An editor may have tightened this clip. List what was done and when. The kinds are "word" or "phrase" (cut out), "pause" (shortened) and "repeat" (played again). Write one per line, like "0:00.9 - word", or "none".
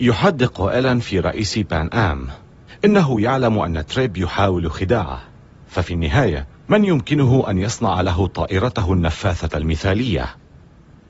none

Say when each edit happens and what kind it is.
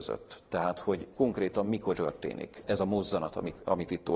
0:01.1 - word
0:01.9 - word
0:02.6 - word

